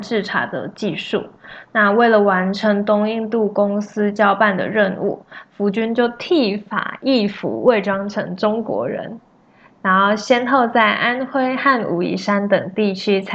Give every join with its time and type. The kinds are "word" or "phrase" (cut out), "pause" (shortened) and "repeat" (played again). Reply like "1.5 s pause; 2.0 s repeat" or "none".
none

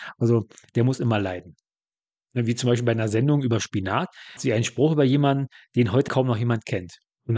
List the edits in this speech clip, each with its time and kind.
4.4 s word; 6.1 s word

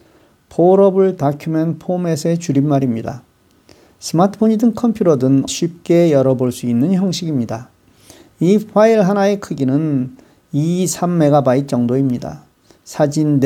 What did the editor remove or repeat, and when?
5.5 s phrase

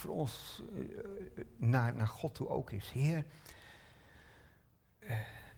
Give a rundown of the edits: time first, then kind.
none

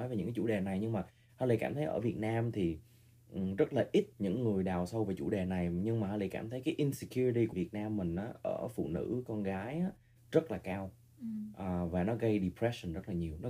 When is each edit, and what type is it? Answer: 4.1 s pause; 7.5 s word

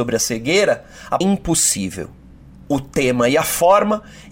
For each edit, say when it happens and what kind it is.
1.2 s phrase

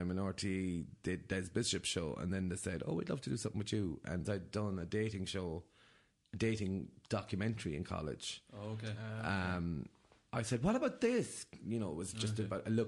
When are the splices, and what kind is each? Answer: 4.2 s word

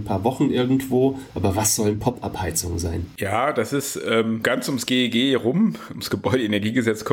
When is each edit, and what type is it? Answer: 4.4 s word

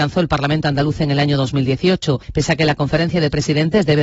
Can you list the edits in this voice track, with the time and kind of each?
2.2 s pause

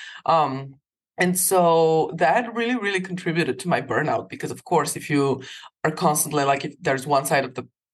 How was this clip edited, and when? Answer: 0.9 s pause

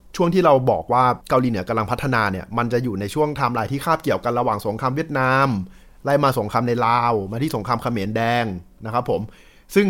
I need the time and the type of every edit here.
1.2 s pause

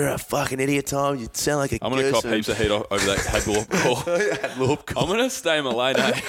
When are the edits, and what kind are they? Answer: none

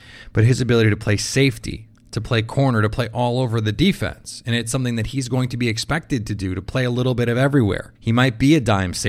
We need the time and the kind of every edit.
7.9 s pause

